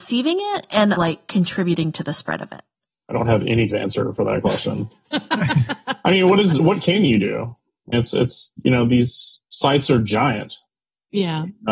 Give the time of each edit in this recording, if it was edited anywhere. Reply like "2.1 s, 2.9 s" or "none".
1.0 s, 3.7 s, 6.6 s, 7.9 s